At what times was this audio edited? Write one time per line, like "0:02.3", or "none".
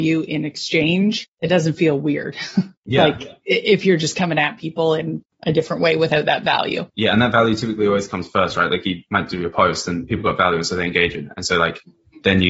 0:06.9

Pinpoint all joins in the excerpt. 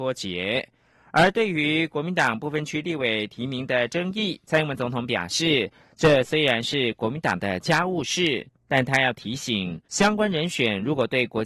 0:09.8

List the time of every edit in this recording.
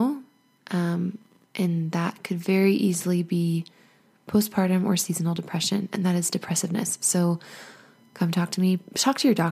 none

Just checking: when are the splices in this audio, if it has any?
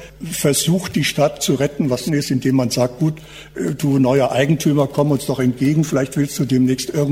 0:02.1

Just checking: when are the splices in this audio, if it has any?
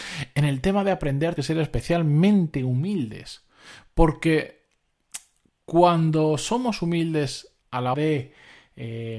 0:01.4
0:05.5
0:07.6
0:07.9

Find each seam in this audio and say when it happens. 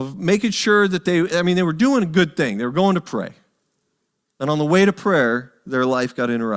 none

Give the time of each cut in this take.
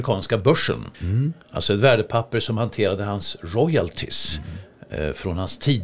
0:00.9

